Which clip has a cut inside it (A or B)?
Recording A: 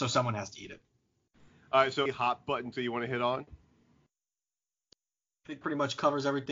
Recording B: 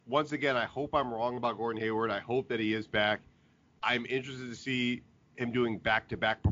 A